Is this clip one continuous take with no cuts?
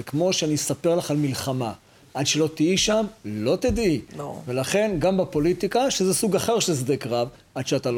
yes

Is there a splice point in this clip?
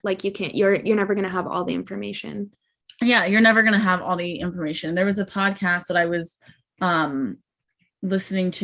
no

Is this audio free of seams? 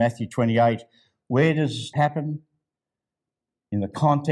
no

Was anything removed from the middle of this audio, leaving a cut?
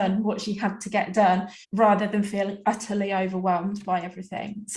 yes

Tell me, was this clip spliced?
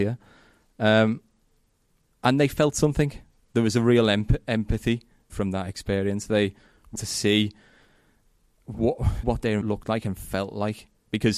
yes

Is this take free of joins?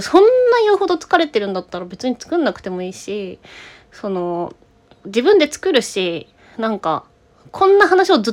no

